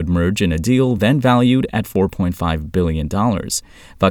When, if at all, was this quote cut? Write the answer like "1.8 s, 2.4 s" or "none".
none